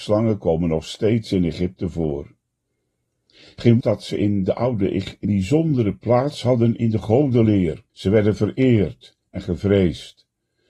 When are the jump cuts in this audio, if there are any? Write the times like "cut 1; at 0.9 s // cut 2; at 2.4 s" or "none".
cut 1; at 3.8 s // cut 2; at 5.2 s // cut 3; at 7.9 s